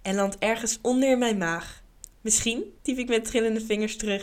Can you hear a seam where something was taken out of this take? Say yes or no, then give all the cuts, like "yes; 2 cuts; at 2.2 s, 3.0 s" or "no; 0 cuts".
yes; 1 cut; at 2.8 s